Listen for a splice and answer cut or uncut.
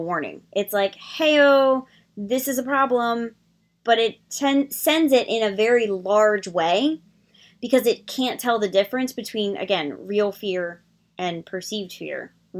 uncut